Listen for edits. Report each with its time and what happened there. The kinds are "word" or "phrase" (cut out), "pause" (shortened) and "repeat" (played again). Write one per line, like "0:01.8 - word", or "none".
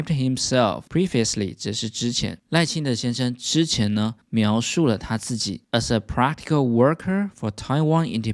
0:04.2 - pause